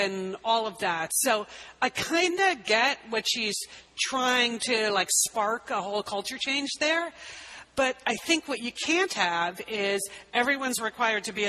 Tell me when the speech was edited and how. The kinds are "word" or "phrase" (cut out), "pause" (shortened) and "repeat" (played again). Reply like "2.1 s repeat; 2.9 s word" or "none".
none